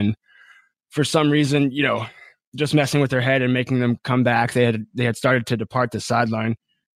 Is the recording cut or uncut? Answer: uncut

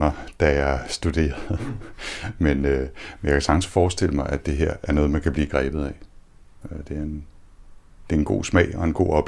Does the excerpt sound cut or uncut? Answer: uncut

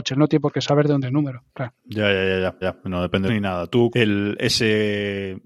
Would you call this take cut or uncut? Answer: cut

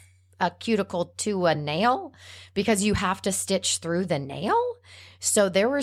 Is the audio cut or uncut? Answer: uncut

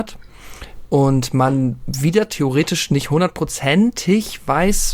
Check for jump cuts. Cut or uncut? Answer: uncut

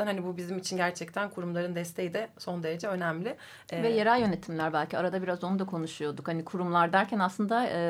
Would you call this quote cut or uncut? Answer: uncut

